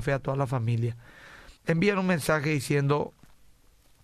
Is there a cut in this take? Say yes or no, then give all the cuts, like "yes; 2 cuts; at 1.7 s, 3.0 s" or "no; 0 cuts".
yes; 1 cut; at 1.6 s